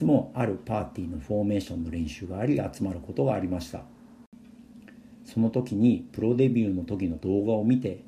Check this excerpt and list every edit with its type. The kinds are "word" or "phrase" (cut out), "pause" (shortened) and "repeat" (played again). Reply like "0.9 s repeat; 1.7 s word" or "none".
none